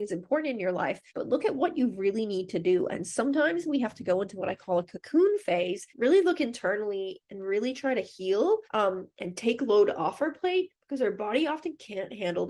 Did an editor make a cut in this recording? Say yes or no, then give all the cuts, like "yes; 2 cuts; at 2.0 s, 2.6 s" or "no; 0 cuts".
yes; 3 cuts; at 1.1 s, 5.9 s, 8.7 s